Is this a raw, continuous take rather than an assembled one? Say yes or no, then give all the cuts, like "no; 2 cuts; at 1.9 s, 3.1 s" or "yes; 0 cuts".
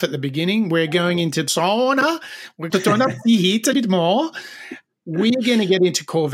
no; 3 cuts; at 1.5 s, 2.7 s, 3.7 s